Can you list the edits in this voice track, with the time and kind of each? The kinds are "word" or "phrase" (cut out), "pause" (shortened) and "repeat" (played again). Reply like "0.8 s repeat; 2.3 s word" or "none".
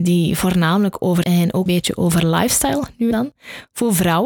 1.2 s phrase; 1.7 s word; 3.1 s word